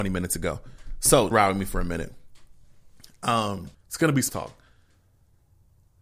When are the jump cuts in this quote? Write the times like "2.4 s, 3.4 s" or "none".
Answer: 1.3 s, 3.7 s, 4.3 s